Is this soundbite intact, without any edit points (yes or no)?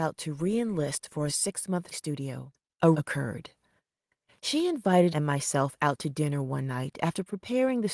no